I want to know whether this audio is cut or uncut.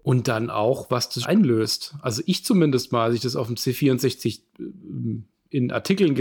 cut